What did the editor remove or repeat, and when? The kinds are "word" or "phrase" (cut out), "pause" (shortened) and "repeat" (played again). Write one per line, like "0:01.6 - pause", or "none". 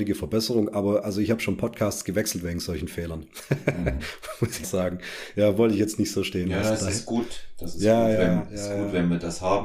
0:04.6 - word